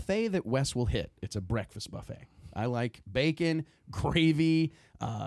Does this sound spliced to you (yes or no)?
no